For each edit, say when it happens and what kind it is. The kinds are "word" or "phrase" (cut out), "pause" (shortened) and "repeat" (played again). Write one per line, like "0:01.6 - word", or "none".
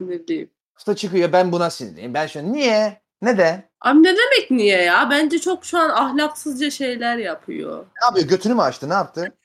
0:03.1 - pause
0:03.7 - pause

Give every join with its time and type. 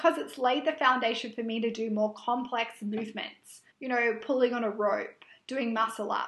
0:03.7 - pause

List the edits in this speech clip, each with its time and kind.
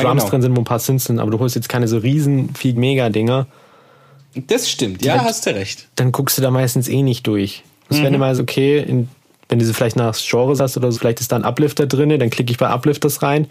0:02.7 - word
0:05.1 - word
0:07.9 - word
0:08.4 - word
0:10.6 - word
0:10.9 - word

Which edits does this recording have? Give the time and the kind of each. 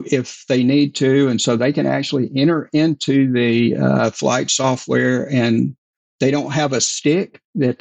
none

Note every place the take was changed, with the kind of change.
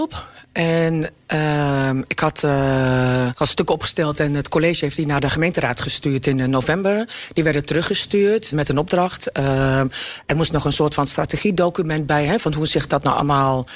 0:03.3 - word
0:08.5 - word

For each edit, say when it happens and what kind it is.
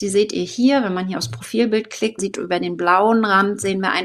0:02.2 - word

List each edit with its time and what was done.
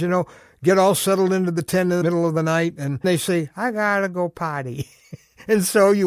0:02.0 - word
0:03.0 - word

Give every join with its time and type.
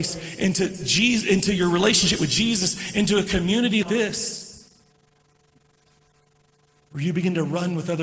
0:03.8 - word

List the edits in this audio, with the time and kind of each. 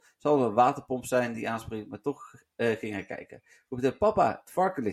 none

